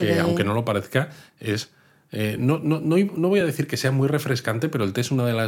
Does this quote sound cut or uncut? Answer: uncut